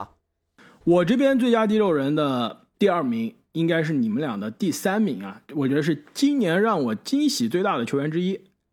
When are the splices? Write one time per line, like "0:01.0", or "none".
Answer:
0:02.7
0:05.5

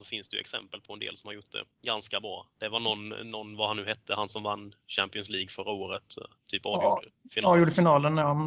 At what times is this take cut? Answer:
0:01.7
0:06.4

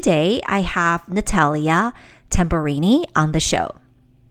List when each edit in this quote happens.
none

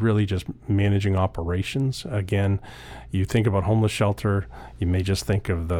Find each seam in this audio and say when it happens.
none

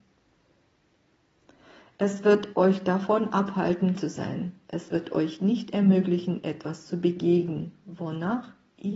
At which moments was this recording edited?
0:03.9

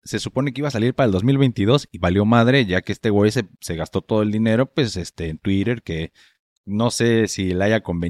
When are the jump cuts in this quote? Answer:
none

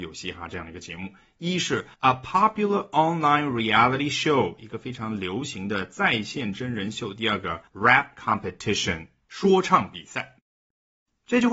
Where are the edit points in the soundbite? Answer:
0:01.9
0:07.7

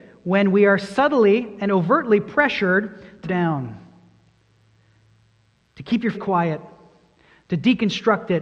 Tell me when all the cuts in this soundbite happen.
0:03.2
0:06.1

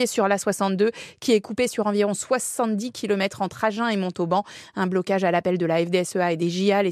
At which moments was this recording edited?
none

